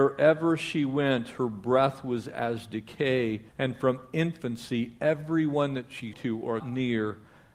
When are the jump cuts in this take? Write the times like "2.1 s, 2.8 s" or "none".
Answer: 3.5 s, 6.1 s, 6.6 s